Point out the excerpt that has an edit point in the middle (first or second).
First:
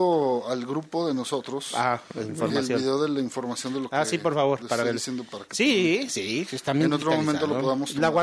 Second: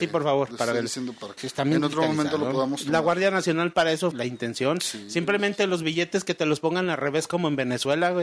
second